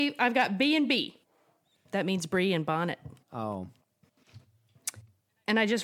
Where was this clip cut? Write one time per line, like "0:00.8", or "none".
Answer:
0:03.2